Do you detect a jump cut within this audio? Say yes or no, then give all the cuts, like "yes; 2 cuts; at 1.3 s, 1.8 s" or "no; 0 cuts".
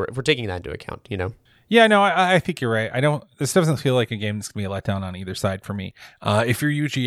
yes; 1 cut; at 1.5 s